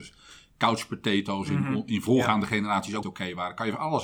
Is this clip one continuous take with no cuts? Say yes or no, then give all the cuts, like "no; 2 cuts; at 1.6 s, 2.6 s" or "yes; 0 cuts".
no; 1 cut; at 3.0 s